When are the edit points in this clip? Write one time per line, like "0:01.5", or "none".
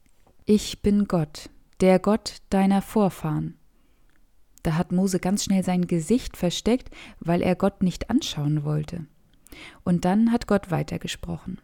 none